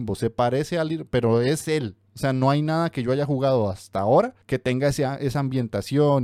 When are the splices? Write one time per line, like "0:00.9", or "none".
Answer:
0:04.4